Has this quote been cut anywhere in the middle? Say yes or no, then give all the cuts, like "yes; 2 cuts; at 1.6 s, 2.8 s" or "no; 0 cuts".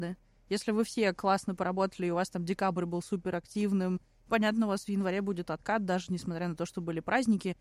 no; 0 cuts